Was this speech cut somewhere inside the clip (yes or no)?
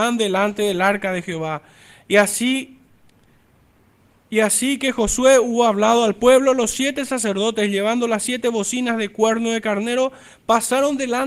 no